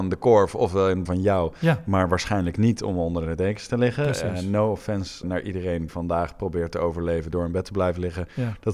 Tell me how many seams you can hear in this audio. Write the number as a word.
three